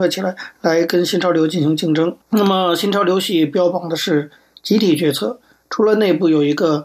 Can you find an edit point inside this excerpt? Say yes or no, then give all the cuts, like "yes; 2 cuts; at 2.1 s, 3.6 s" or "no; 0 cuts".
yes; 1 cut; at 2.2 s